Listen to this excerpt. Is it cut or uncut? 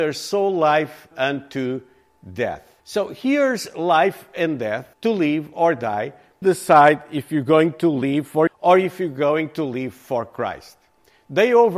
cut